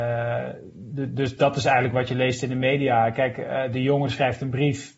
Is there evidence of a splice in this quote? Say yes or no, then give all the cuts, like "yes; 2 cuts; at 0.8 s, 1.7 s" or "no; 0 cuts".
no; 0 cuts